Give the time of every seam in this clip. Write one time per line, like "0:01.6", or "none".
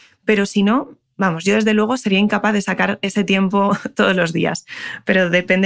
none